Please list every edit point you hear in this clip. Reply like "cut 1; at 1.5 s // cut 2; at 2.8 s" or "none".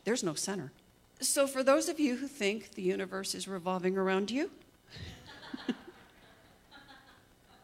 cut 1; at 1.0 s